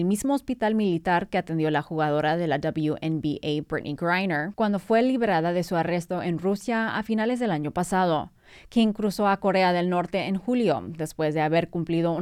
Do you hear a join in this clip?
no; 0 cuts

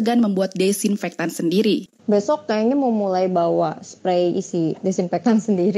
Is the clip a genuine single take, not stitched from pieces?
no; 1 cut; at 2.0 s

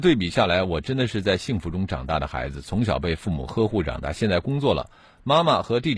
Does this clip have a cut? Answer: no; 0 cuts

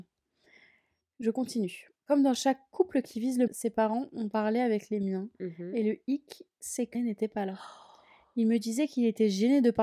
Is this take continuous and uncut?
no; 2 cuts; at 3.5 s, 6.9 s

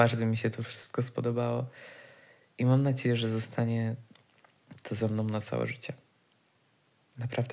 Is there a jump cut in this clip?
no; 0 cuts

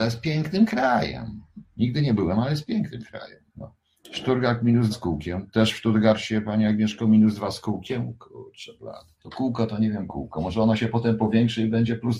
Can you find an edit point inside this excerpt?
yes; 4 cuts; at 3.5 s, 4.9 s, 9.2 s, 10.1 s

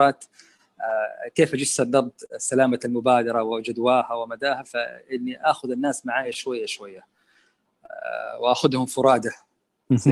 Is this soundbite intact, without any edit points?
yes; 0 cuts

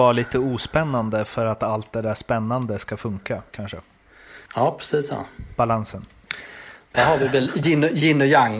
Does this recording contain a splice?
yes; 1 cut; at 4.5 s

